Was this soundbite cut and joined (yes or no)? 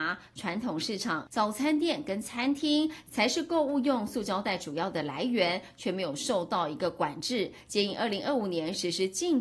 yes